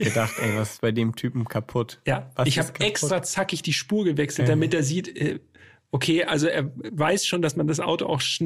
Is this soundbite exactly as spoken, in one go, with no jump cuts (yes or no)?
yes